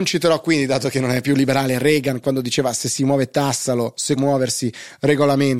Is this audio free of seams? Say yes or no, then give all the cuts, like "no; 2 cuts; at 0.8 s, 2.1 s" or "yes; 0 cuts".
no; 1 cut; at 4.2 s